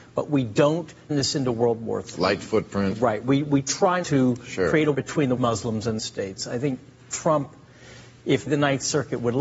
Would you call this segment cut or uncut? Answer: cut